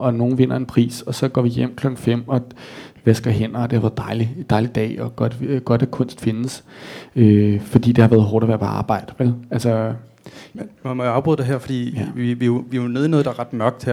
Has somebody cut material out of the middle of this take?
no; 0 cuts

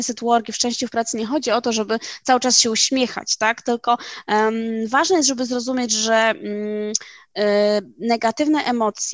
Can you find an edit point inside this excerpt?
no; 0 cuts

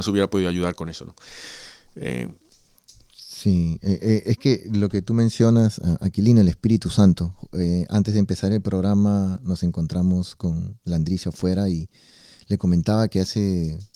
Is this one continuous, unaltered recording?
yes; 0 cuts

